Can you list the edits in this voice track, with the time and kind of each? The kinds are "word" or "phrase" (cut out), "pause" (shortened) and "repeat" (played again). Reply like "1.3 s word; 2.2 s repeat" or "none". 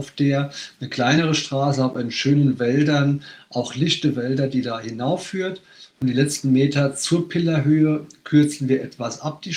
none